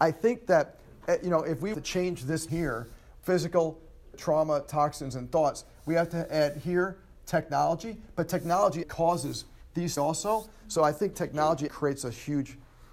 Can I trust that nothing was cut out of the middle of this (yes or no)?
no